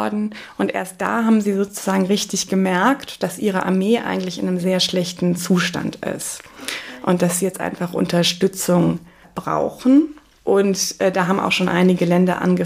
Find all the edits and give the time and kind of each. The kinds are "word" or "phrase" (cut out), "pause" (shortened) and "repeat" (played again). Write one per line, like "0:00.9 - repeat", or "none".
none